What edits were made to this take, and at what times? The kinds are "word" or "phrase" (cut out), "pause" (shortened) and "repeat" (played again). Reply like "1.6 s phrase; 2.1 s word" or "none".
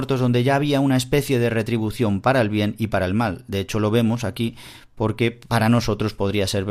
none